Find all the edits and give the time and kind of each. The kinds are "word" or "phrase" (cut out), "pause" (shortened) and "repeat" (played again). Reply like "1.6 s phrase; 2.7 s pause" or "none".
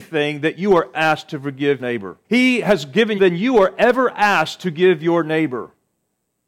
0.9 s word; 1.8 s word; 2.2 s pause; 3.2 s phrase